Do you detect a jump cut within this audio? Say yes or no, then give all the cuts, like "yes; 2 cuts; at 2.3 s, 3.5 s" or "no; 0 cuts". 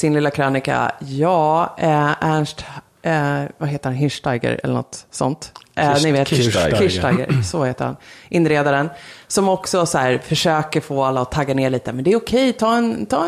no; 0 cuts